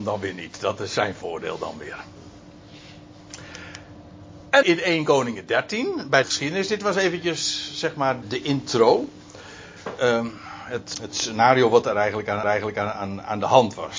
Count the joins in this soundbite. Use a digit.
5